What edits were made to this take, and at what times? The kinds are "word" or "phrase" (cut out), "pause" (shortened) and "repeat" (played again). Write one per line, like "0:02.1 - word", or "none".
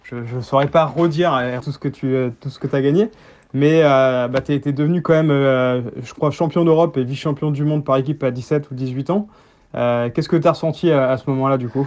0:01.6 - word